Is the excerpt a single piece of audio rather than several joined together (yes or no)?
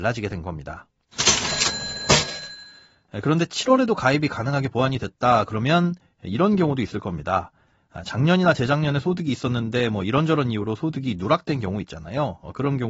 yes